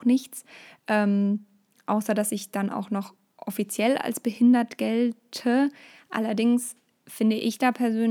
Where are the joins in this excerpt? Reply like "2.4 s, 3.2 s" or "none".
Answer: none